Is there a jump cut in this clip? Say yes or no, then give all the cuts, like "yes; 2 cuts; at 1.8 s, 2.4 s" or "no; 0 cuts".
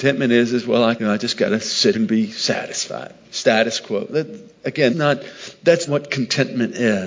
yes; 5 cuts; at 1.0 s, 1.9 s, 3.2 s, 4.9 s, 5.9 s